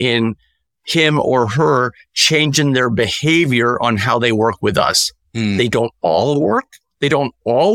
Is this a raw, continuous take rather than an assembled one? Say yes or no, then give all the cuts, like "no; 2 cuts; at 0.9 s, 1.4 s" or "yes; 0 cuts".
yes; 0 cuts